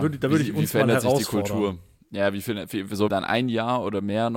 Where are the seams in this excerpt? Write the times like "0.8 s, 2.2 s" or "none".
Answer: 3.1 s